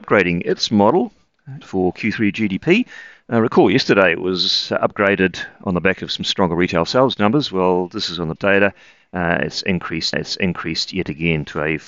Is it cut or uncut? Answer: cut